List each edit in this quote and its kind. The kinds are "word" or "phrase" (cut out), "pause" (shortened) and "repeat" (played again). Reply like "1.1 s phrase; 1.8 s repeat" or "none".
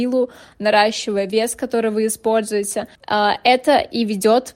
2.9 s pause